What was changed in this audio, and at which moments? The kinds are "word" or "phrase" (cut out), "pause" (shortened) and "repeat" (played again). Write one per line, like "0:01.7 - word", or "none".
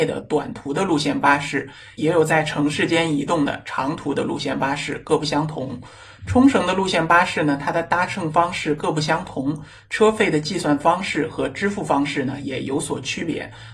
none